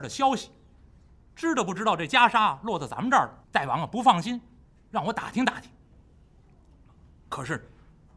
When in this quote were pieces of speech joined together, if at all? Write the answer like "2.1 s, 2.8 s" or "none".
3.4 s

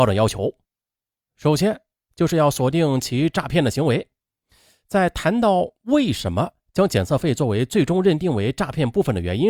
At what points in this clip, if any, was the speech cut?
none

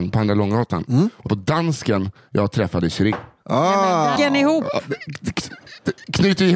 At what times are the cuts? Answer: 1.3 s, 4.2 s

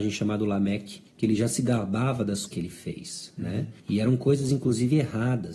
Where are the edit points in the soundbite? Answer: 1.1 s, 2.5 s, 3.8 s

